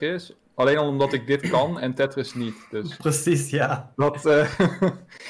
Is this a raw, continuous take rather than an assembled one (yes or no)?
yes